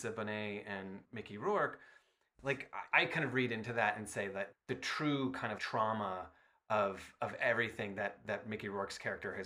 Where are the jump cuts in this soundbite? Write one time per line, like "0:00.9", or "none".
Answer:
0:01.0
0:02.9
0:04.5
0:05.6